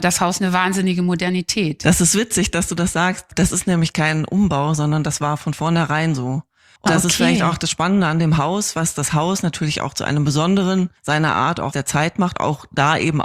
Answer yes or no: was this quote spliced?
yes